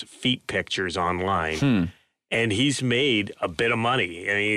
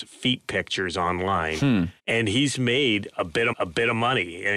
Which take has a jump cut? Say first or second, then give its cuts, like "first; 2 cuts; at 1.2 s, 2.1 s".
second; 2 cuts; at 2.0 s, 3.5 s